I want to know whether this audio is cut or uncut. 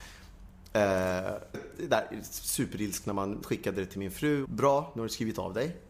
cut